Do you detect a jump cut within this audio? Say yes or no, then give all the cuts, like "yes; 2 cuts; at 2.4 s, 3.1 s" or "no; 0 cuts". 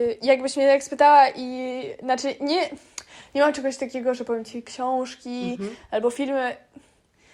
no; 0 cuts